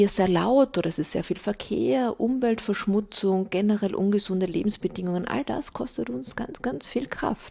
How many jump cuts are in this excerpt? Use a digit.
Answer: 0